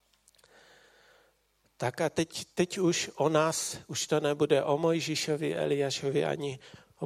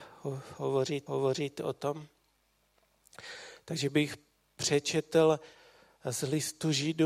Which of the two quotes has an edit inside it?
second; 1 cut; at 1.1 s

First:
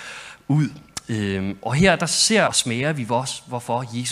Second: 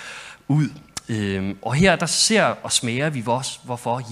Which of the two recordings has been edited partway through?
first; 1 cut; at 2.5 s

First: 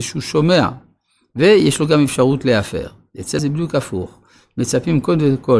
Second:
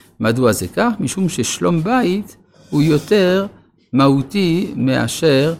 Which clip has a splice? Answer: first; 1 cut; at 3.4 s

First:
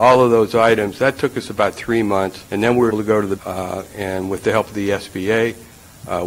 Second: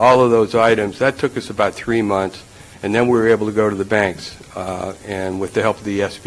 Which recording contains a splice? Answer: first; 3 cuts; at 2.5 s, 2.9 s, 3.4 s

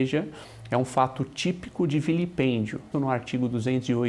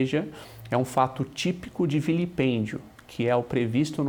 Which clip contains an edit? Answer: first; 1 cut; at 2.9 s

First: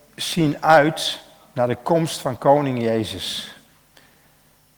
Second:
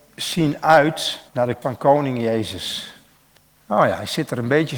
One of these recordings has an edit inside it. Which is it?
second; 3 cuts; at 1.3 s, 1.6 s, 3.4 s

